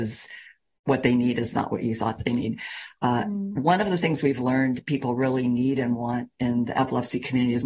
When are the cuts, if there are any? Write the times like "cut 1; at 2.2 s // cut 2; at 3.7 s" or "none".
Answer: none